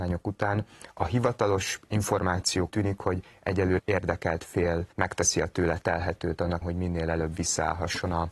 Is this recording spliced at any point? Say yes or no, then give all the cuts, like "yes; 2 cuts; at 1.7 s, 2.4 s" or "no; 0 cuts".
yes; 4 cuts; at 2.7 s, 3.8 s, 4.9 s, 6.6 s